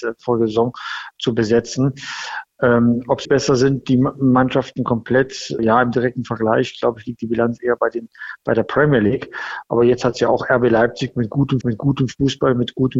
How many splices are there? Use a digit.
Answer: 3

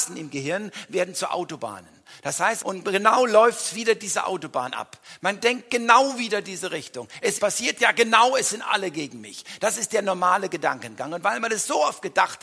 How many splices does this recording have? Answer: 2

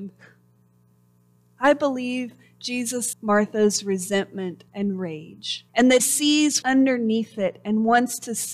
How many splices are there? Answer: 6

